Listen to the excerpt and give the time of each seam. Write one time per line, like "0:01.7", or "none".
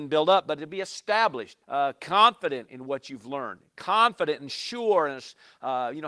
0:01.6